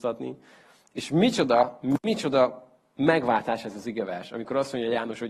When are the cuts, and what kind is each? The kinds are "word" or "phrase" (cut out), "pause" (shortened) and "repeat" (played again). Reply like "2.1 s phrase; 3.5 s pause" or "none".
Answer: none